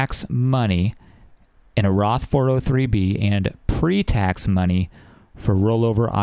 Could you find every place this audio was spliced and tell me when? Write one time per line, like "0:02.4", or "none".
none